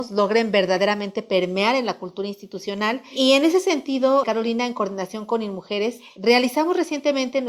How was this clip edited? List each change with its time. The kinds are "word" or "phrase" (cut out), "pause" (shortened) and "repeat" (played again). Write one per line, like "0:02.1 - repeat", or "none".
0:04.2 - word